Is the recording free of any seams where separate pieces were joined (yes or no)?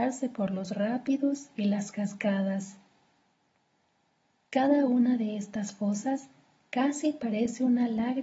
yes